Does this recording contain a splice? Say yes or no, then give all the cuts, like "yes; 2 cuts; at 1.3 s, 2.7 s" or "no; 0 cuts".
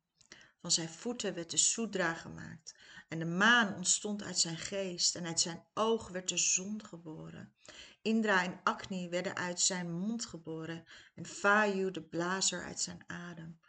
no; 0 cuts